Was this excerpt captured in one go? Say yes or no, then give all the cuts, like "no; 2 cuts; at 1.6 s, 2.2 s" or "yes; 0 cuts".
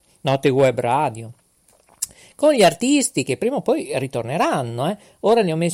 yes; 0 cuts